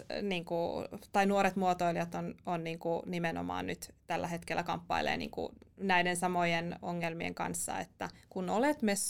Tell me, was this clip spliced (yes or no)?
no